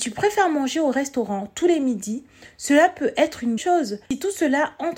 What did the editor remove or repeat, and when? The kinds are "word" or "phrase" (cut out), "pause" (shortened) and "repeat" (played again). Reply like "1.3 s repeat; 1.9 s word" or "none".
3.6 s word; 4.0 s pause